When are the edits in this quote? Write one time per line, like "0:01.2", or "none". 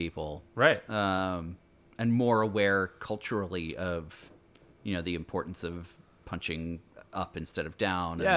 none